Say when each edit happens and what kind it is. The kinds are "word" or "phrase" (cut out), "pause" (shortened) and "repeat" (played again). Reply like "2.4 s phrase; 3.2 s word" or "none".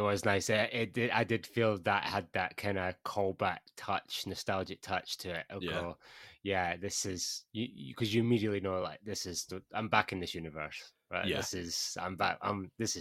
none